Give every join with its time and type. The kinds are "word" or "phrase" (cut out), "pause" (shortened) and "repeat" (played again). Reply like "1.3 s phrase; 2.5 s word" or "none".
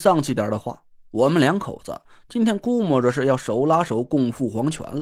none

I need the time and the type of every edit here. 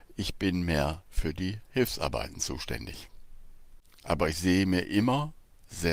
none

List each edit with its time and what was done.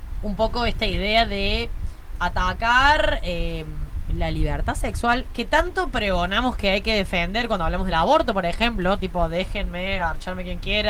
none

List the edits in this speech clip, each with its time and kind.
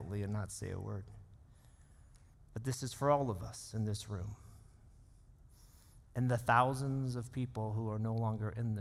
2.3 s pause

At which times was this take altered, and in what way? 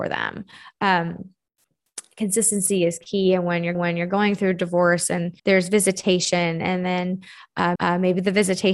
3.7 s repeat; 5.4 s pause; 7.8 s repeat

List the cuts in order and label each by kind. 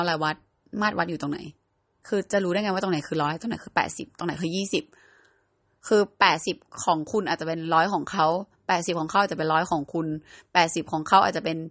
none

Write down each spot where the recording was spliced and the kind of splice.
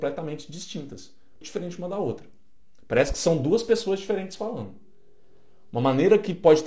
1.4 s word

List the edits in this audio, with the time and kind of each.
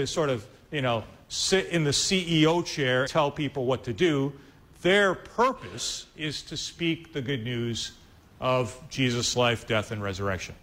3.1 s word

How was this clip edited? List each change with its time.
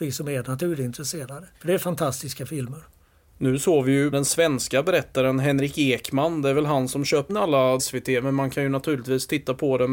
1.5 s pause; 4.1 s phrase; 7.3 s word; 7.8 s phrase

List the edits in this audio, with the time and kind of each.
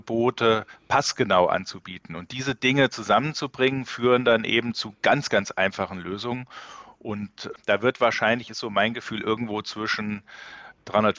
none

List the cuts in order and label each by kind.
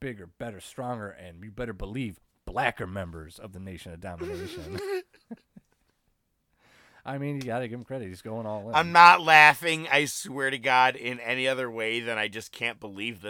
none

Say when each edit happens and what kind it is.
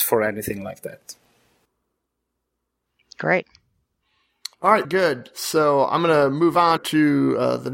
4.5 s pause; 4.8 s word; 6.8 s word

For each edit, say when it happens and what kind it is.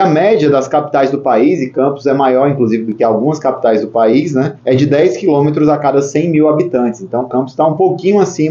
4.6 s pause

